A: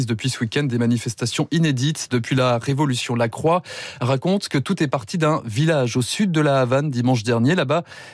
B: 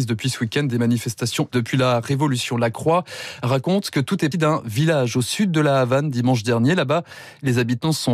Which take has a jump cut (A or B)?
B